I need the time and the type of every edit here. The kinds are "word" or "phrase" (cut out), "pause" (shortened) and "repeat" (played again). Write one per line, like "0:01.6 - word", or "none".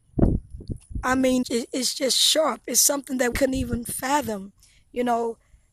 0:01.4 - word
0:03.3 - word

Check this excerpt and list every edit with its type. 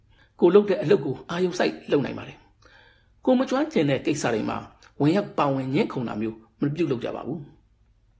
none

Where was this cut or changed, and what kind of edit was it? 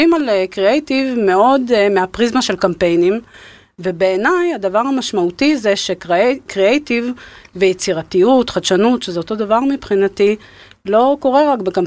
none

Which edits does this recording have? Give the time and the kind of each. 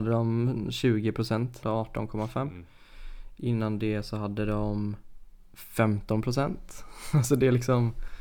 0:01.6 - phrase

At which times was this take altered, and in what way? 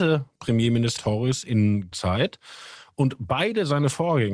0:01.0 - word
0:01.9 - word

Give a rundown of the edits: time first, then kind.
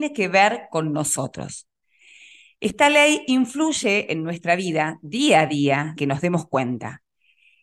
0:06.0 - word

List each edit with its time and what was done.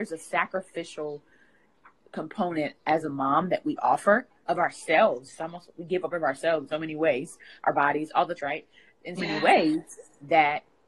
0:06.1 - word
0:06.7 - word
0:08.4 - word
0:09.2 - word

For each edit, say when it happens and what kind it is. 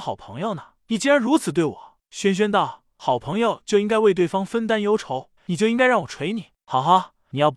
0:05.4 - phrase

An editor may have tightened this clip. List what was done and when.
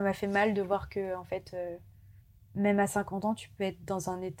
none

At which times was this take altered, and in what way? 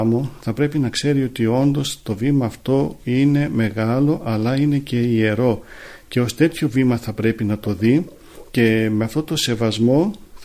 none

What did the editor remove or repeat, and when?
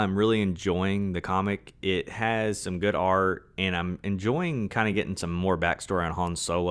none

